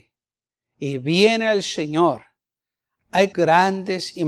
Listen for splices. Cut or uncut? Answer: cut